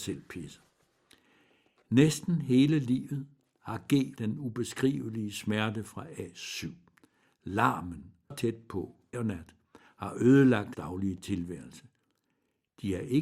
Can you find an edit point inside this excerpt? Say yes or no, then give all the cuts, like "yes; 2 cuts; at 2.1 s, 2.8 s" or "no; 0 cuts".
yes; 4 cuts; at 4.2 s, 8.3 s, 9.1 s, 10.7 s